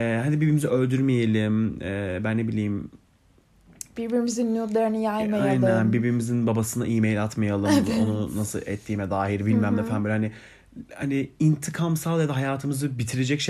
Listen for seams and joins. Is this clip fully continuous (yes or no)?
yes